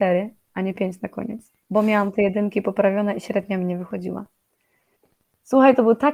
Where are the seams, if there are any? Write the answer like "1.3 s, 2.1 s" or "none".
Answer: 1.6 s